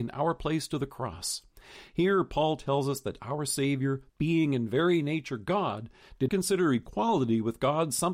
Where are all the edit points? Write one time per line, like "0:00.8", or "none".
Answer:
0:04.1
0:06.3